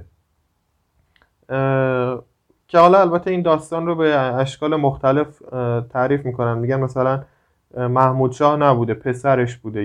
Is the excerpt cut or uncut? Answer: uncut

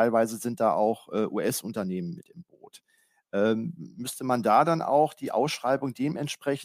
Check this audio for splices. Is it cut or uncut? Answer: uncut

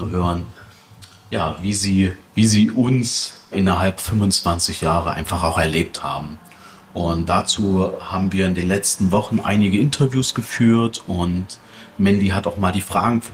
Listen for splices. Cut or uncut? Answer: cut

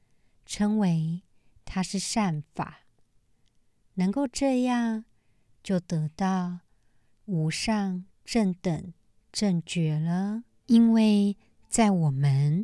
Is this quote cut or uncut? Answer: uncut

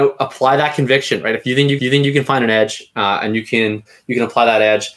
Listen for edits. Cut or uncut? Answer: cut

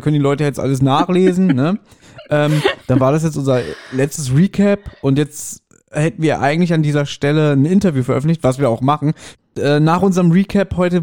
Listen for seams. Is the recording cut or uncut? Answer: uncut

